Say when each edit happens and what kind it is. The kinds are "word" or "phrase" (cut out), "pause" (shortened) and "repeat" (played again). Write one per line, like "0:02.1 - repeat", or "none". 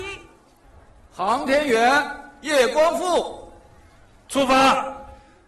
none